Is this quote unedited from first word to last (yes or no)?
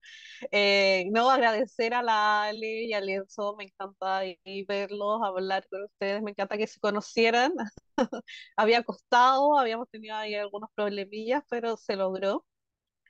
yes